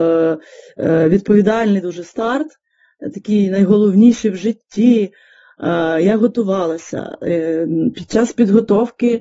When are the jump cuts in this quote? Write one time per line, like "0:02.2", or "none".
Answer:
none